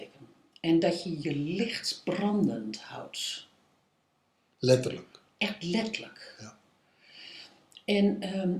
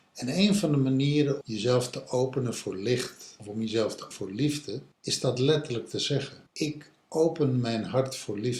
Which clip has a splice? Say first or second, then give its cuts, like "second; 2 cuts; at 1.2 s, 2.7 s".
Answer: second; 5 cuts; at 1.4 s, 3.4 s, 4.1 s, 4.9 s, 6.5 s